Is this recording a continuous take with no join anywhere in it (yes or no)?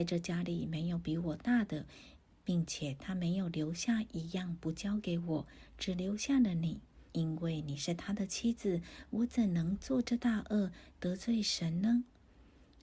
no